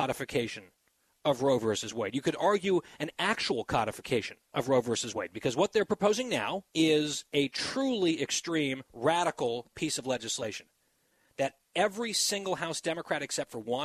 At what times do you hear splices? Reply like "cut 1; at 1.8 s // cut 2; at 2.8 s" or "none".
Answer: cut 1; at 6.7 s // cut 2; at 8.9 s